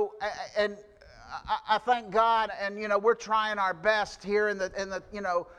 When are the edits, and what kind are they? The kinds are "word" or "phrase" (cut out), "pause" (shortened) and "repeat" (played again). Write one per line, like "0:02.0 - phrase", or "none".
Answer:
0:02.5 - word